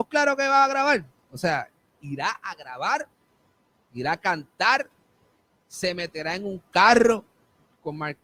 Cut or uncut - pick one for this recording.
uncut